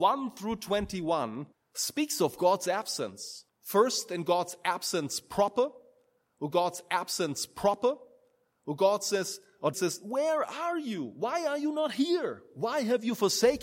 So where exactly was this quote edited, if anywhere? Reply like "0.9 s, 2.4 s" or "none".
1.5 s, 3.5 s, 6.5 s, 9.7 s